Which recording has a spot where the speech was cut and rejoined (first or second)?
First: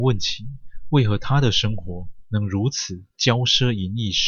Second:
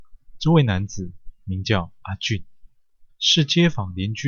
second